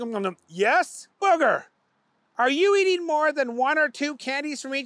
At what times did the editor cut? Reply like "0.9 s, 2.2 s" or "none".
1.1 s